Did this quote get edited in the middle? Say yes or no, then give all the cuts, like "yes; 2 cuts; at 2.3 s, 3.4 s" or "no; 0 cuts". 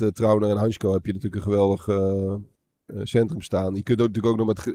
no; 0 cuts